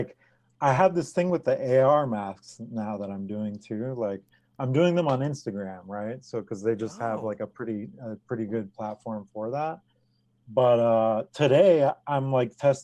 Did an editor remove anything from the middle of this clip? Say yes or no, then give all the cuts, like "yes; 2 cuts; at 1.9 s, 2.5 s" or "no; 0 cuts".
no; 0 cuts